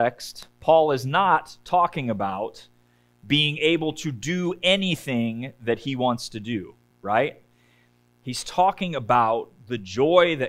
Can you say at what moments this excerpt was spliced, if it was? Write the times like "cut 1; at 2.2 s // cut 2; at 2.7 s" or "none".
cut 1; at 6.9 s